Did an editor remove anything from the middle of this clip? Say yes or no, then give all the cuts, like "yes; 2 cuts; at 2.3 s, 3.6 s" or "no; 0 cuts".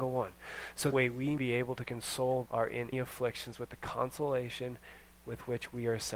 yes; 4 cuts; at 0.9 s, 1.4 s, 2.5 s, 2.9 s